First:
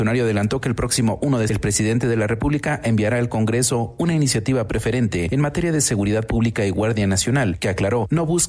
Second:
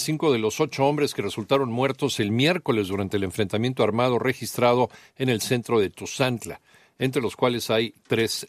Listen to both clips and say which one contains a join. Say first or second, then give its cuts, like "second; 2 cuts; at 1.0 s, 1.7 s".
first; 1 cut; at 1.5 s